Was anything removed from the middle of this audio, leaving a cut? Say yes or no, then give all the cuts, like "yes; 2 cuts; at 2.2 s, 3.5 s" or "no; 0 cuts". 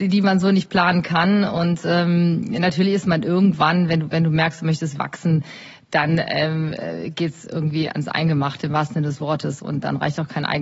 no; 0 cuts